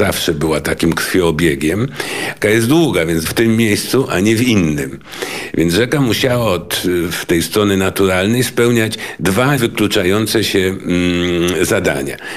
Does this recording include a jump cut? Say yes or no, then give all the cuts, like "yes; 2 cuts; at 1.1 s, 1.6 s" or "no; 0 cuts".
yes; 3 cuts; at 2.4 s, 3.2 s, 9.6 s